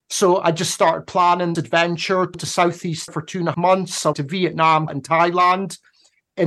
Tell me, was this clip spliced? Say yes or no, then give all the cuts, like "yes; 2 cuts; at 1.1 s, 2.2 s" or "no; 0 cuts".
yes; 6 cuts; at 1.5 s, 2.3 s, 3.1 s, 3.5 s, 4.1 s, 4.9 s